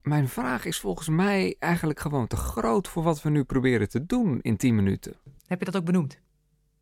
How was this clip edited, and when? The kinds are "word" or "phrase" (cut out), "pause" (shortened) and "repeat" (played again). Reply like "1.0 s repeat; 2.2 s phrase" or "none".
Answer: 5.4 s pause